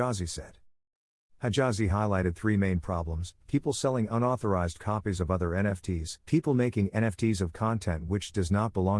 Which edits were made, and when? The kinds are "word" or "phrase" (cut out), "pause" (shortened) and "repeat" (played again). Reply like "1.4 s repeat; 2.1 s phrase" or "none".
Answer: 6.2 s pause